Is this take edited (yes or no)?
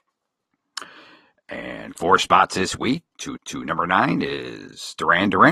yes